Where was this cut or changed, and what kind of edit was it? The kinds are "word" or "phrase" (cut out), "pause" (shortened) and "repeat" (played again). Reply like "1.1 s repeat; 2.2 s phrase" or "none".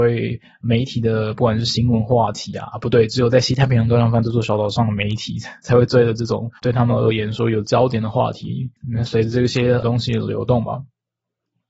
6.6 s pause